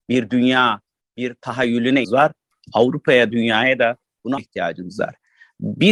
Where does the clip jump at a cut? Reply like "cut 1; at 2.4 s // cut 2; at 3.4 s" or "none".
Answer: cut 1; at 2.0 s // cut 2; at 3.3 s // cut 3; at 4.4 s